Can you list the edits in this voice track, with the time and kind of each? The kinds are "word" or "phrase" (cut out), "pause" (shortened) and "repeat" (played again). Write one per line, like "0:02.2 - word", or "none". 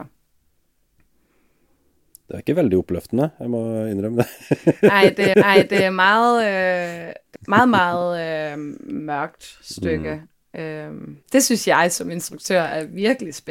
0:05.3 - repeat
0:07.4 - word
0:11.2 - pause